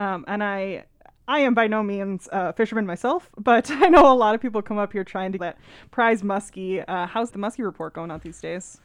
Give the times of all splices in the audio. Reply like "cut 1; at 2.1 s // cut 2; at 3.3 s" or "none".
cut 1; at 5.4 s // cut 2; at 7.3 s